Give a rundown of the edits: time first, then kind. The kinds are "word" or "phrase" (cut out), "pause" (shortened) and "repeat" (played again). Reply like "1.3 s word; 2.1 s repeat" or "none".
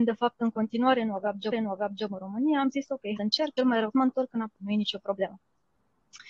1.5 s repeat; 3.2 s phrase; 3.6 s word; 3.9 s word; 4.6 s word